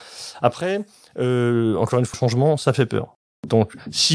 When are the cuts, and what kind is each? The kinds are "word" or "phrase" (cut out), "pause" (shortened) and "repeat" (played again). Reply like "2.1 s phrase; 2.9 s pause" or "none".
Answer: 2.1 s word